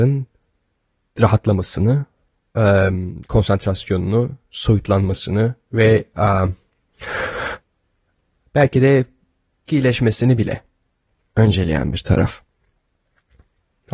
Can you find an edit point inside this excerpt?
yes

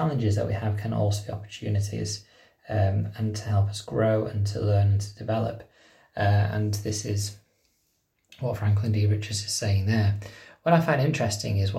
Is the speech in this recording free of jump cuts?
yes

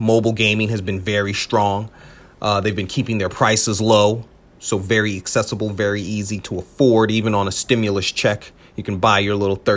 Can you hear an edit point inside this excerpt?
no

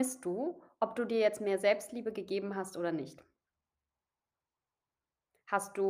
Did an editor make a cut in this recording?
no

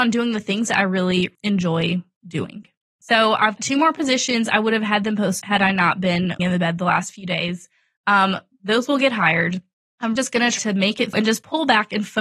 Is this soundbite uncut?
no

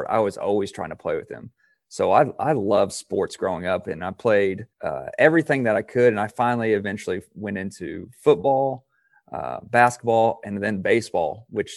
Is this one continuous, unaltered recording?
no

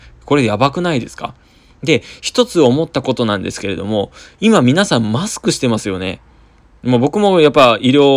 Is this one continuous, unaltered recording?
yes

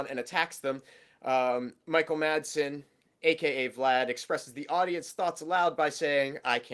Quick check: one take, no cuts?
yes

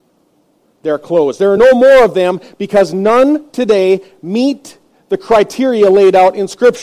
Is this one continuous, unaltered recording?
yes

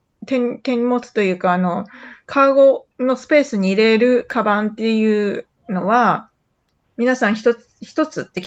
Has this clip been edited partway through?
yes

